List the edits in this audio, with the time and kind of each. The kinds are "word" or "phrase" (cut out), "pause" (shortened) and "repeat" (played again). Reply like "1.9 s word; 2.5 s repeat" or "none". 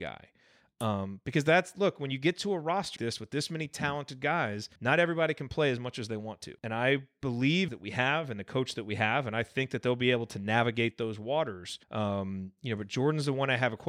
3.0 s word; 4.8 s pause; 6.6 s pause; 7.7 s phrase; 11.8 s pause